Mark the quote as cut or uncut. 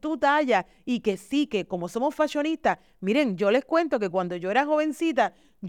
uncut